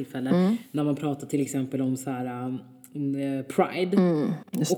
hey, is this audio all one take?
yes; 0 cuts

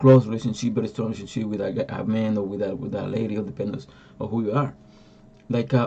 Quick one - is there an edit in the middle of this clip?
yes; 1 cut; at 1.6 s

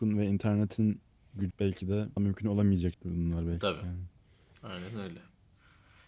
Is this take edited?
yes; 3 cuts; at 1.5 s, 2.2 s, 2.9 s

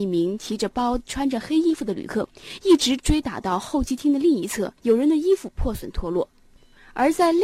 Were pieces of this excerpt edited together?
yes; 1 cut; at 4.8 s

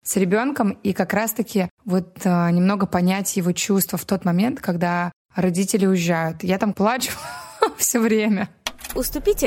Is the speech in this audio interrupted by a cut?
yes; 2 cuts; at 1.7 s, 6.7 s

